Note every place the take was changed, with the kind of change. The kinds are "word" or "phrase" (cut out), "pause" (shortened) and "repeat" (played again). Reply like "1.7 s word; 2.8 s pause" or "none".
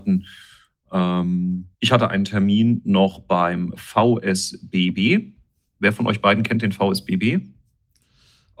1.7 s pause